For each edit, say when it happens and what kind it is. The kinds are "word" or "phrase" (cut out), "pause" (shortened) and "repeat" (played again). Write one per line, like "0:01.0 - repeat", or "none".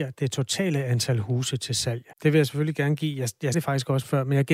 0:02.1 - pause
0:03.5 - word